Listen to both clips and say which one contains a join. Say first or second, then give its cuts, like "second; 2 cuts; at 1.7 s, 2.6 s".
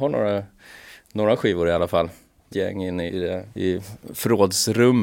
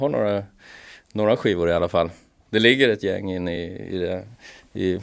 first; 3 cuts; at 2.5 s, 3.1 s, 3.5 s